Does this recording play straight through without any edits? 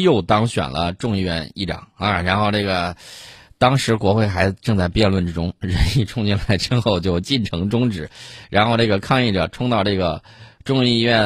yes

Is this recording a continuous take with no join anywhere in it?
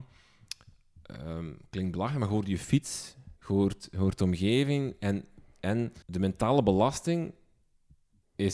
no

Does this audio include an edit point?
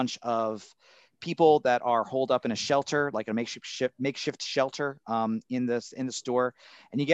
no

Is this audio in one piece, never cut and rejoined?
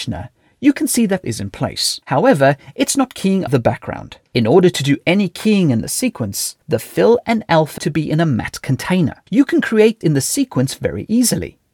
no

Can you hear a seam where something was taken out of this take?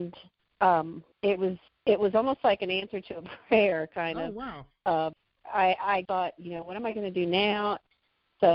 yes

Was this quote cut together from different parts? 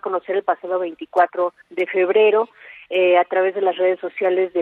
yes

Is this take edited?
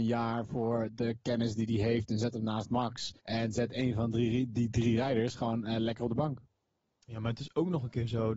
yes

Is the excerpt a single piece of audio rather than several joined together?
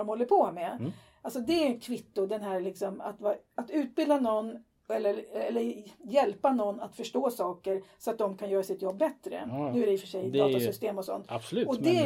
yes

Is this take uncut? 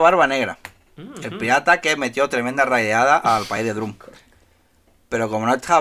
yes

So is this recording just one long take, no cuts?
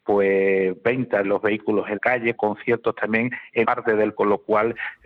no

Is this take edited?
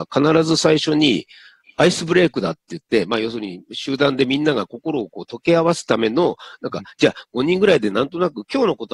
no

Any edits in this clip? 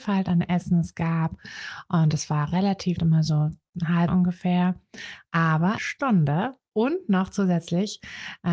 yes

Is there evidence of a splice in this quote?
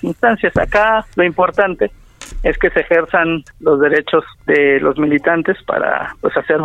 yes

